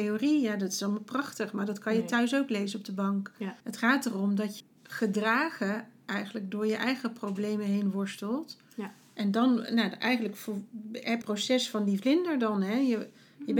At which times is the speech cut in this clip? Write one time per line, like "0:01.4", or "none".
0:03.6
0:04.6
0:11.2